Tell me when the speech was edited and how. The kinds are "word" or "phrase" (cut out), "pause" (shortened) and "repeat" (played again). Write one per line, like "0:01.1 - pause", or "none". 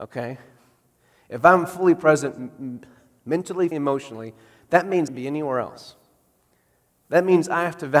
0:03.7 - word
0:05.1 - phrase